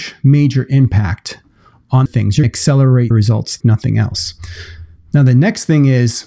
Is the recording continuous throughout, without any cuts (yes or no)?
no